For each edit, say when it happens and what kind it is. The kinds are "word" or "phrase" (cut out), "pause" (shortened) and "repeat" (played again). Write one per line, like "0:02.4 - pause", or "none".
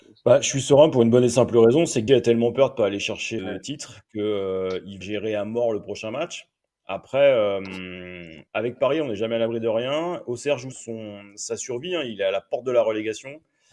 0:02.1 - word
0:03.4 - word
0:05.0 - word
0:08.5 - pause
0:10.7 - word